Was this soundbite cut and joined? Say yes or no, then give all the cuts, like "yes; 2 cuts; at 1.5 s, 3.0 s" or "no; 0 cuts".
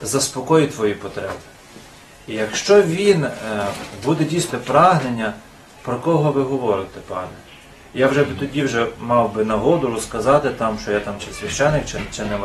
yes; 1 cut; at 4.5 s